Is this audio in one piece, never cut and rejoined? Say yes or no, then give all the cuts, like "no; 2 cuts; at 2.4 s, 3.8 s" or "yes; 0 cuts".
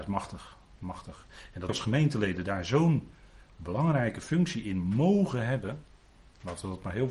no; 2 cuts; at 1.7 s, 6.1 s